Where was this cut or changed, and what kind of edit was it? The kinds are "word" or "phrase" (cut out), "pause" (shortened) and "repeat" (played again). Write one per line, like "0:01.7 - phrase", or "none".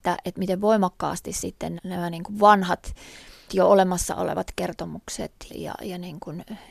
0:01.8 - word
0:03.5 - word
0:05.5 - word